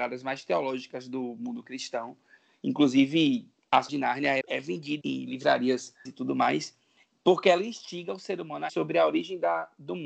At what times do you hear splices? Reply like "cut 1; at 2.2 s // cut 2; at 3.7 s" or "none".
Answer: cut 1; at 3.9 s // cut 2; at 4.4 s // cut 3; at 5.0 s // cut 4; at 6.0 s // cut 5; at 8.7 s